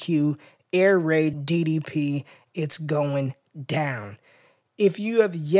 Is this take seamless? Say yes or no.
no